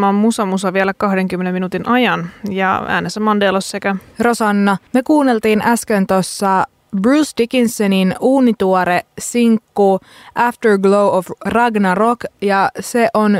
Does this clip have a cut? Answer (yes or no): yes